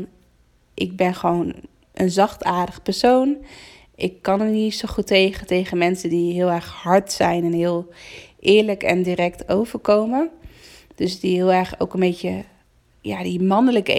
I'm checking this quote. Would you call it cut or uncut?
uncut